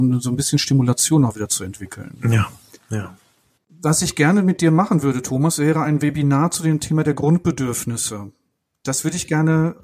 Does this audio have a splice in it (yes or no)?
no